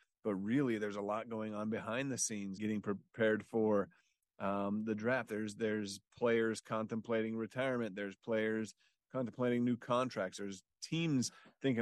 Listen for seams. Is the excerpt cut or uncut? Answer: cut